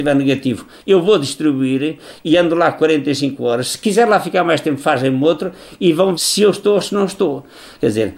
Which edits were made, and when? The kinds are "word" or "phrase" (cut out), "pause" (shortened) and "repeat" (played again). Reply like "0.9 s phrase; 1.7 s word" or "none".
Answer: 6.1 s word

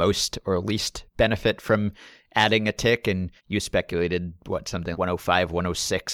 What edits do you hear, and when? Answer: 3.4 s pause; 4.9 s word

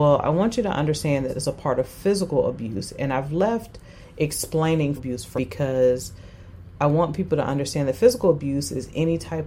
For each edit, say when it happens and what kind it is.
1.3 s phrase; 5.0 s word; 5.4 s word

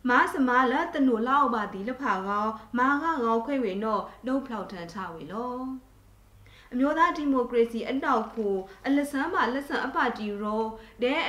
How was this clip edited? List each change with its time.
none

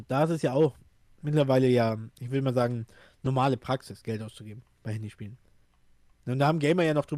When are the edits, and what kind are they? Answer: 2.1 s pause

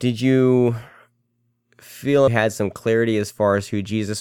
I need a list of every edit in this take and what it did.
2.3 s phrase

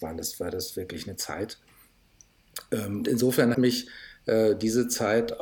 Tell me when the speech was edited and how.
1.2 s word; 3.0 s word; 3.5 s word

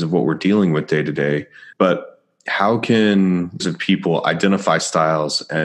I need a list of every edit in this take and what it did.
1.7 s pause; 3.6 s word

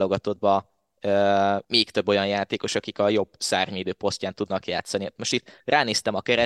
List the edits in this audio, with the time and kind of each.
1.6 s pause

